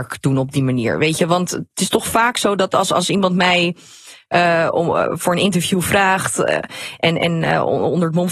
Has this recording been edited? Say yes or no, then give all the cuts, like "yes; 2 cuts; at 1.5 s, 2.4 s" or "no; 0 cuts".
no; 0 cuts